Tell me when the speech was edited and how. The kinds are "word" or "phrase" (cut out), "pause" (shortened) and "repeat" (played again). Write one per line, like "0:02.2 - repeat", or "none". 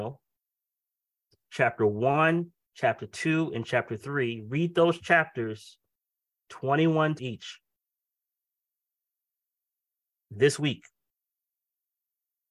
0:07.2 - word